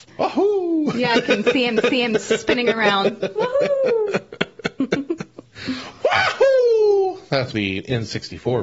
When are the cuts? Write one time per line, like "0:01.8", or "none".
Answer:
0:01.8
0:07.5